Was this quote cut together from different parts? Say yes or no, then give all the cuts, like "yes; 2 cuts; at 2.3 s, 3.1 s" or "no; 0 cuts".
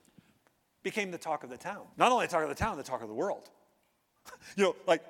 yes; 1 cut; at 1.9 s